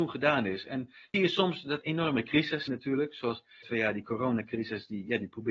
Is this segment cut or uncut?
cut